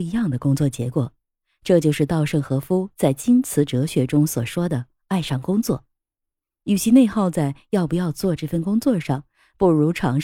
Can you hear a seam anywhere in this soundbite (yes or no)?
no